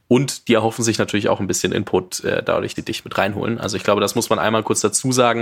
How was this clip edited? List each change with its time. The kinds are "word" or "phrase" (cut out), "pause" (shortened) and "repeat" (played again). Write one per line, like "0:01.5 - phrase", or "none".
0:02.7 - word